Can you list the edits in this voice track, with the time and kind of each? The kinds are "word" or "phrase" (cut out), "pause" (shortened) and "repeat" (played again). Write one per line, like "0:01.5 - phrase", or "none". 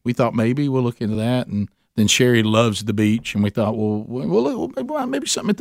none

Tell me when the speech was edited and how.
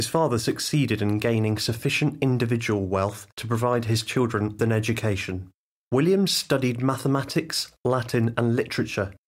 0:03.3 - pause
0:04.6 - word
0:05.8 - pause

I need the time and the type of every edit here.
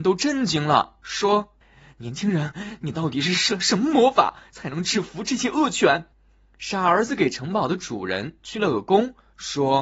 0:01.6 - pause
0:06.1 - pause

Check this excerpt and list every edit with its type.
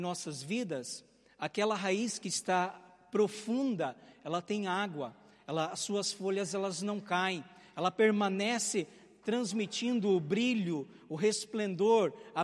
none

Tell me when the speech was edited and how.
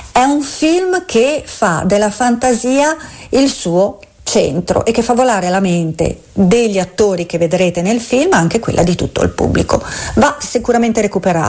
none

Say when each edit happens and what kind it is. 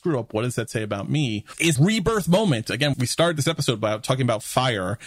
0:01.8 - word
0:02.9 - word

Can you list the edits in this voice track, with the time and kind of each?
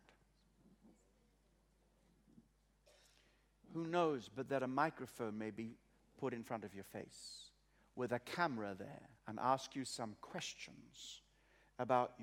0:09.2 - pause

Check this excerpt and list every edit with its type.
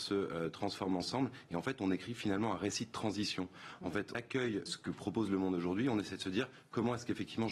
0:04.1 - word
0:04.7 - word

